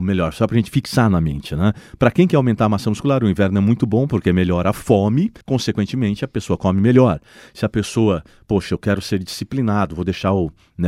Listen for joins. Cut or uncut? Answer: cut